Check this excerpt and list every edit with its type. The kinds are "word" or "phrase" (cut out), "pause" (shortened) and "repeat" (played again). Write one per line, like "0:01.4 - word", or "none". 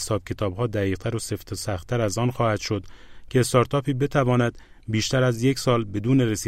none

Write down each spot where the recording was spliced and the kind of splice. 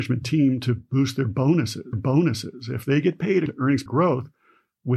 0:01.9 - repeat
0:03.5 - word
0:03.9 - word

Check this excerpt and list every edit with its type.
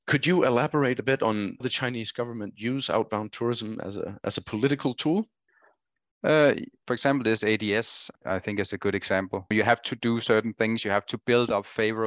0:01.6 - word
0:05.5 - pause

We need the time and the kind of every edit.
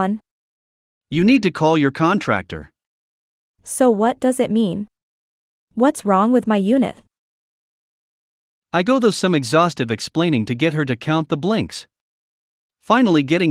none

